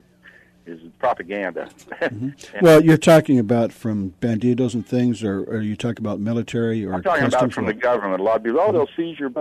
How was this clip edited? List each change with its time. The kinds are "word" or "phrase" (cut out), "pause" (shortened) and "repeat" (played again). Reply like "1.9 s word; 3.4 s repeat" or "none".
0.9 s word

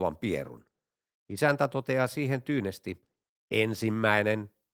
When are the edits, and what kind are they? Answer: none

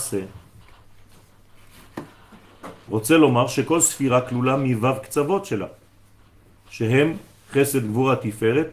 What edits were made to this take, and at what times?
none

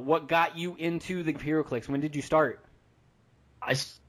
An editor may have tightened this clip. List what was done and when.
1.3 s word

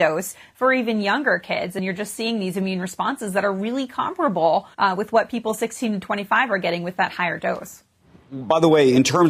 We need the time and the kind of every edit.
4.7 s pause

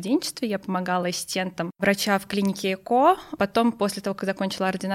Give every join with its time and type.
none

